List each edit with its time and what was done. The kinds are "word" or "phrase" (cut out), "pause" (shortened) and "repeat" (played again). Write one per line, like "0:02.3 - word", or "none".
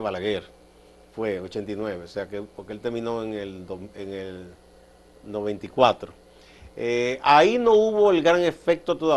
none